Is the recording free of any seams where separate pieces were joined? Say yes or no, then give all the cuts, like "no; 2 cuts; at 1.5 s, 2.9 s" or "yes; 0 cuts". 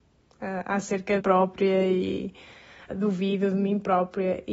no; 2 cuts; at 1.2 s, 2.9 s